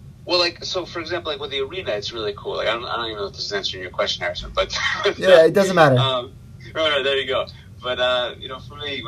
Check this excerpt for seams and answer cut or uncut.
uncut